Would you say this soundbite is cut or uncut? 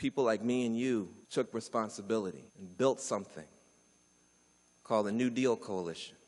cut